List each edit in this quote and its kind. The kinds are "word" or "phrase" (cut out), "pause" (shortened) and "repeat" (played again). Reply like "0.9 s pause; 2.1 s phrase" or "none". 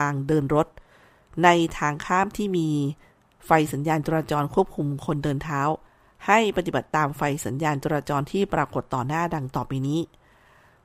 none